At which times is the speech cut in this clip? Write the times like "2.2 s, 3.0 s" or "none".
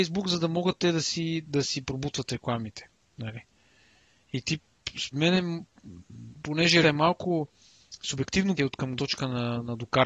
1.4 s, 5.1 s, 6.8 s, 8.6 s, 9.0 s